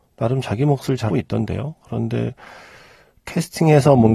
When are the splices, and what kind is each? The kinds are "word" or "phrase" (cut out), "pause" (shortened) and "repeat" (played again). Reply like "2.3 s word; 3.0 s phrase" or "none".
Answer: 1.1 s word